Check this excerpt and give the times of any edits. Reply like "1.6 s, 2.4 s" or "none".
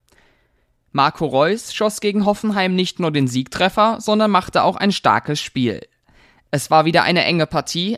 none